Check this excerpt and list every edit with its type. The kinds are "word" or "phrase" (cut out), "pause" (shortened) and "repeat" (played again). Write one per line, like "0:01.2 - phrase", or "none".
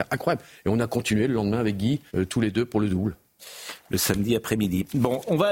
0:02.1 - pause